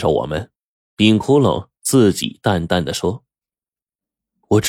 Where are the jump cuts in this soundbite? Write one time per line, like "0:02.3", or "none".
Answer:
none